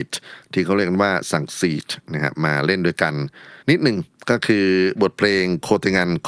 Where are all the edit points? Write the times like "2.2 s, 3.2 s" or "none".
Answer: 3.6 s